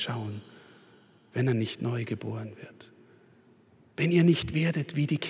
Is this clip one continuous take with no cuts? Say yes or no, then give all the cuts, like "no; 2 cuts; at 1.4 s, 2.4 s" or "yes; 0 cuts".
yes; 0 cuts